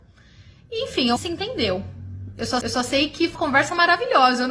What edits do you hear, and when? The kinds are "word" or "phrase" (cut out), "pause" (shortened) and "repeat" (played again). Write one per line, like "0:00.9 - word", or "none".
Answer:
0:01.2 - phrase
0:02.6 - repeat
0:03.3 - word